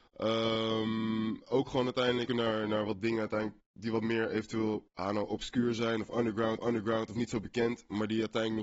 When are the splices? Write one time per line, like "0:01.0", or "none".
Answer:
0:02.3
0:06.6